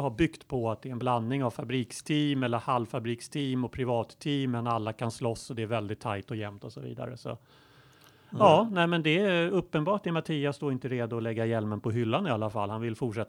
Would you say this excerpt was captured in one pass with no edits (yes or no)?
yes